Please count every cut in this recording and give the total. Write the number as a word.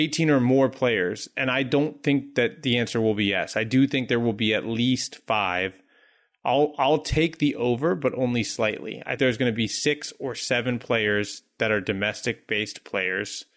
one